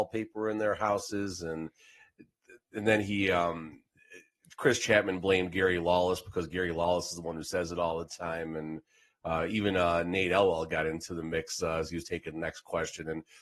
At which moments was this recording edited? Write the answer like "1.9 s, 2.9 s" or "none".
none